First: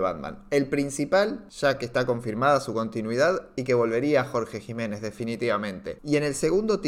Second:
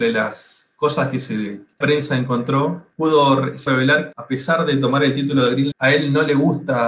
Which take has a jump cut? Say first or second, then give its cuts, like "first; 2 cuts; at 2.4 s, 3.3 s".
second; 4 cuts; at 1.8 s, 3.7 s, 4.1 s, 5.7 s